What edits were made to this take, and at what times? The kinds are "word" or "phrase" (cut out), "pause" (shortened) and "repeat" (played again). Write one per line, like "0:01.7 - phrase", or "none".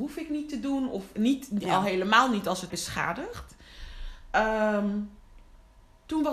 0:02.7 - word